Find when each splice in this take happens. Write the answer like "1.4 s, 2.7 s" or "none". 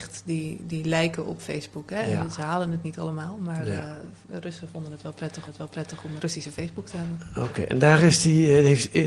5.5 s, 6.2 s

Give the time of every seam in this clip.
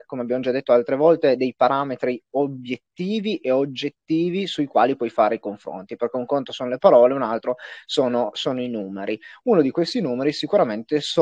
none

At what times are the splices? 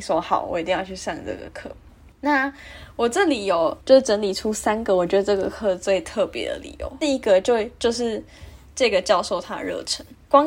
none

